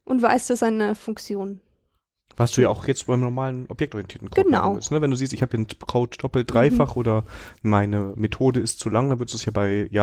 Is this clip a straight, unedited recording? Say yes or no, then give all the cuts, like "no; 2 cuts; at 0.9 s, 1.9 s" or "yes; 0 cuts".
yes; 0 cuts